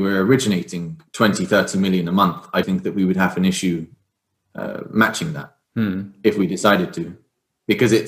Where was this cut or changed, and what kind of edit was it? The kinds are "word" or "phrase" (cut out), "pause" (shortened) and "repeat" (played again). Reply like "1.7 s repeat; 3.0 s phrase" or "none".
1.1 s pause; 2.6 s word; 5.6 s pause